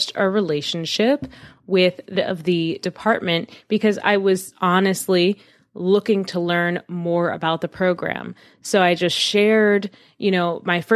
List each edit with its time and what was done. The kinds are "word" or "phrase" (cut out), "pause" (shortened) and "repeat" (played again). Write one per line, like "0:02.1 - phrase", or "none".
0:02.1 - word
0:04.5 - word